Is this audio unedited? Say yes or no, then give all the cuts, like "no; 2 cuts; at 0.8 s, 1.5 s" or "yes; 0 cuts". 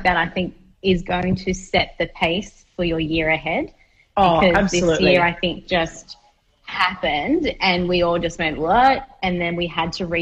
yes; 0 cuts